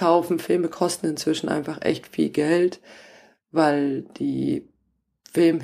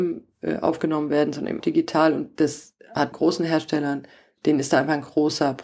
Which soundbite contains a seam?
second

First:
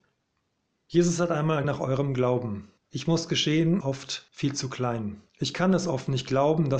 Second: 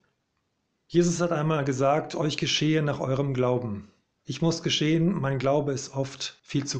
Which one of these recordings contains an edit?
first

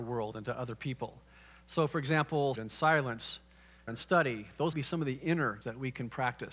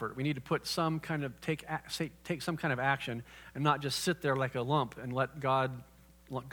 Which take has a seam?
first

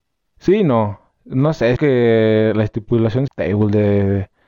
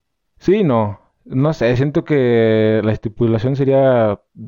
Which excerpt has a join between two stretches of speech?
first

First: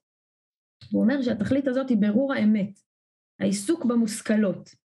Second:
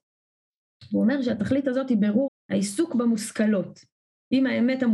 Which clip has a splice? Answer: second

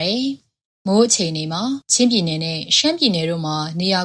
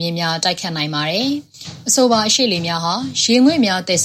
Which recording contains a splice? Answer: first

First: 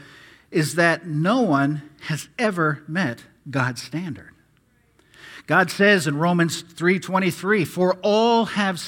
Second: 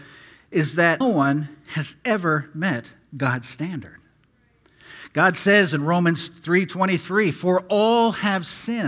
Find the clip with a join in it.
second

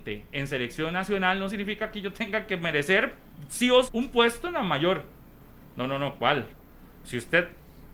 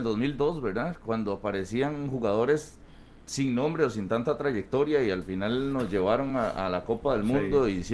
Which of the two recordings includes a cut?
first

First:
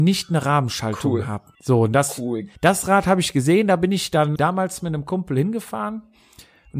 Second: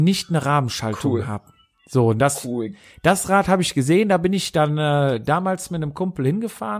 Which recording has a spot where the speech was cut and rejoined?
first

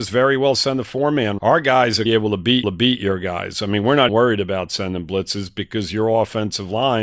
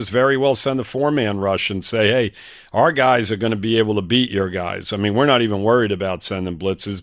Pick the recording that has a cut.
first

